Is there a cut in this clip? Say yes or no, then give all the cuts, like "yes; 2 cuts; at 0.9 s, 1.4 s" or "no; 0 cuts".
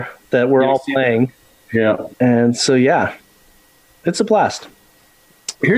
yes; 1 cut; at 2.1 s